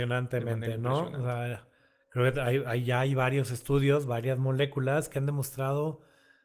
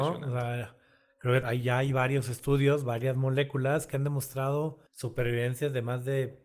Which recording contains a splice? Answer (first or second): second